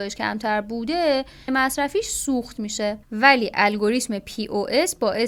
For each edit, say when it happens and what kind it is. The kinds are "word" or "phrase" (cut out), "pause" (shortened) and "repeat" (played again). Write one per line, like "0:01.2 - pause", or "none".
0:01.5 - word
0:03.0 - pause